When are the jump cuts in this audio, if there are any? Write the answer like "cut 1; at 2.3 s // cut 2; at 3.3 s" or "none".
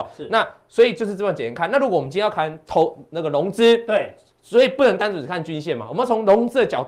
none